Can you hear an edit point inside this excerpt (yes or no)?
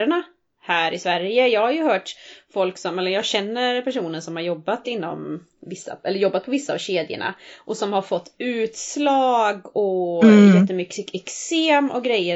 no